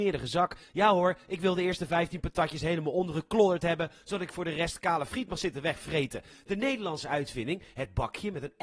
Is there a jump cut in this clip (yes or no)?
no